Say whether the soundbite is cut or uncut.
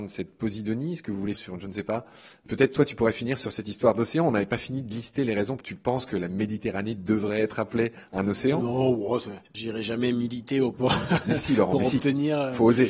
cut